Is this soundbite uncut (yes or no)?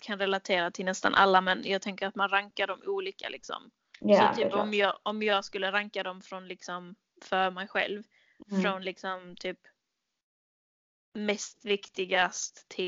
yes